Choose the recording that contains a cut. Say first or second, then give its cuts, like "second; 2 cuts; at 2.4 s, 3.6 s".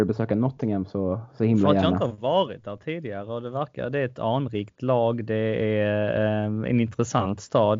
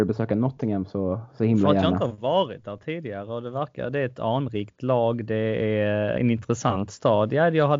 second; 1 cut; at 6.1 s